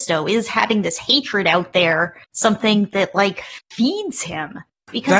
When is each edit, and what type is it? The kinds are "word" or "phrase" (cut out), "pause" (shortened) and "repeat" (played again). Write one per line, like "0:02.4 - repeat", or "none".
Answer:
0:02.2 - pause